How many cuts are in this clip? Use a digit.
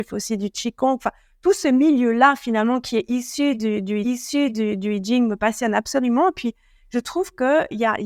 1